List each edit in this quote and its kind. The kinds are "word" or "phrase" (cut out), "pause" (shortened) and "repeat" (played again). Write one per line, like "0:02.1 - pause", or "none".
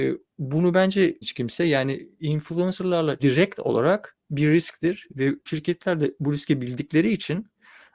0:01.2 - word
0:03.2 - word
0:05.5 - word

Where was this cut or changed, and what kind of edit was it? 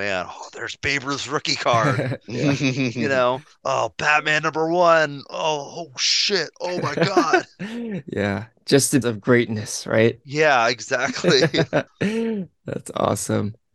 0:09.0 - phrase
0:11.9 - pause

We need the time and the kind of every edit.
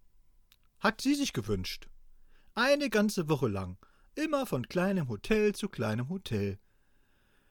none

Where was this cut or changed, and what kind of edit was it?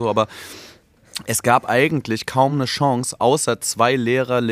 none

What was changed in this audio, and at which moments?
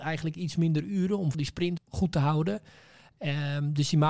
0:01.3 - word
0:01.8 - word

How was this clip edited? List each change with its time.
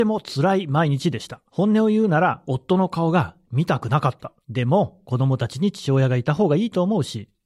0:01.5 - pause
0:04.4 - pause

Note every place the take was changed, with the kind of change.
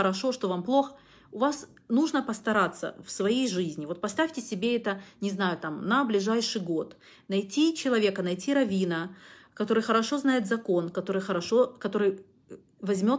none

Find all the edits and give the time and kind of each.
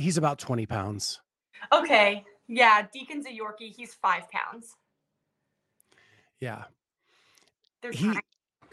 none

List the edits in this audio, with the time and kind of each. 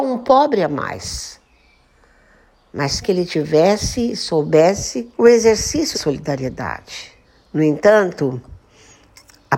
0:03.0 - word
0:05.1 - pause
0:05.9 - word
0:07.2 - pause

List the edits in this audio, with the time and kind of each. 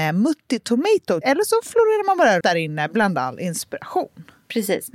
0:01.2 - word
0:02.4 - word

